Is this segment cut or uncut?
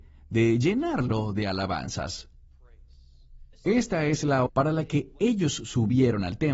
cut